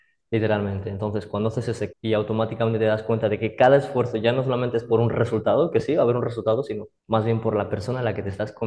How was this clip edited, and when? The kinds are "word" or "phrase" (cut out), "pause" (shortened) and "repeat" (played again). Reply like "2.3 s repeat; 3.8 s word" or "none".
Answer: 1.9 s word; 7.0 s pause